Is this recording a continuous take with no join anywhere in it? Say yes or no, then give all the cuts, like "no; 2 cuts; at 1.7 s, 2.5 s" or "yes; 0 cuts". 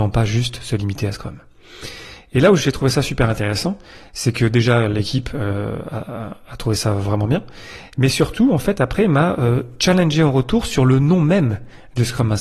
yes; 0 cuts